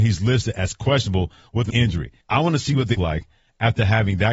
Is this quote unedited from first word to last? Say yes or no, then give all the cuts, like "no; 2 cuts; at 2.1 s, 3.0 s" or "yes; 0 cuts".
no; 3 cuts; at 1.7 s, 2.2 s, 2.9 s